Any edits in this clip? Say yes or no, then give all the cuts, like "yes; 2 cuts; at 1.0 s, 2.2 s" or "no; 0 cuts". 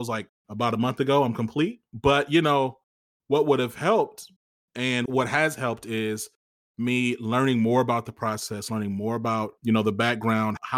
no; 0 cuts